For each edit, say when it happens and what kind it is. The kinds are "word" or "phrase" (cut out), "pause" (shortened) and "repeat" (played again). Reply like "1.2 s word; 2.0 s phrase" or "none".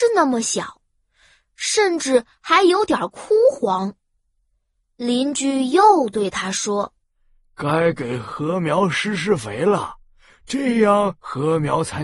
7.0 s pause